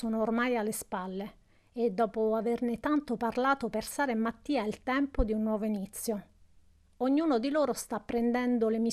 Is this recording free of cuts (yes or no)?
yes